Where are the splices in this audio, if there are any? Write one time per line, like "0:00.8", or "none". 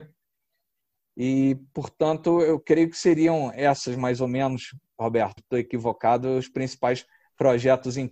0:05.4